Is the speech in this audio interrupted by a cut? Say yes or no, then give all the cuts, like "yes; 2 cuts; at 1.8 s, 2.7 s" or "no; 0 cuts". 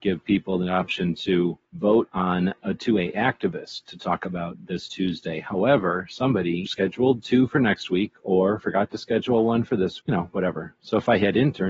yes; 3 cuts; at 1.7 s, 6.7 s, 10.0 s